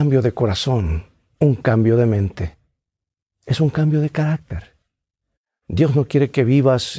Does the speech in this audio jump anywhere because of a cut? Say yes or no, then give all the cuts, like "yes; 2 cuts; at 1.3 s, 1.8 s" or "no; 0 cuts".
no; 0 cuts